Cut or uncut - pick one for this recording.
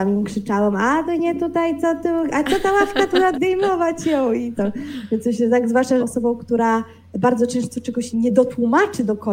cut